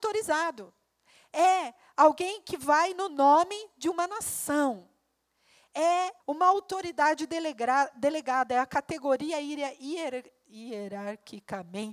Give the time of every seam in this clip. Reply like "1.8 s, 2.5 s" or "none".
6.2 s